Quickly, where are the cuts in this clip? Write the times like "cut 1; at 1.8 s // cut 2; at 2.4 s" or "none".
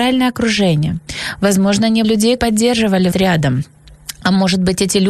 cut 1; at 2.0 s // cut 2; at 2.4 s // cut 3; at 3.1 s

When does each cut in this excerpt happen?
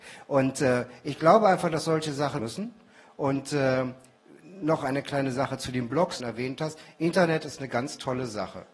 cut 1; at 2.4 s // cut 2; at 6.2 s

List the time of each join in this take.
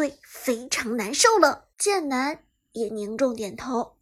cut 1; at 1.7 s

